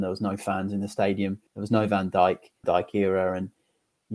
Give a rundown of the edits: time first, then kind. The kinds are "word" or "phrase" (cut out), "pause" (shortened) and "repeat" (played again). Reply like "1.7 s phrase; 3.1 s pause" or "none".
1.5 s pause; 2.6 s phrase